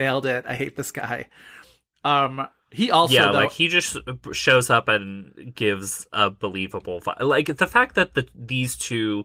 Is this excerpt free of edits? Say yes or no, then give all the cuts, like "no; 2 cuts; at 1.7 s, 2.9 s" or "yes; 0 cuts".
yes; 0 cuts